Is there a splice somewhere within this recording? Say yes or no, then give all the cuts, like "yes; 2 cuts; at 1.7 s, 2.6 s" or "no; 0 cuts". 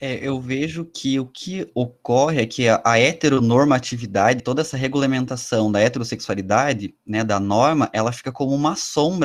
yes; 1 cut; at 4.4 s